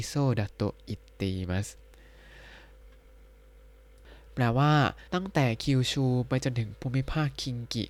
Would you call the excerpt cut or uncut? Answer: cut